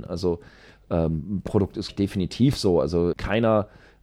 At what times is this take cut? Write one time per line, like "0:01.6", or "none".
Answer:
0:01.5
0:01.9
0:03.1